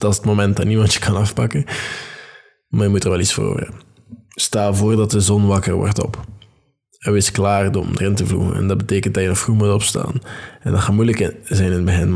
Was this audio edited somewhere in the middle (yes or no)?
no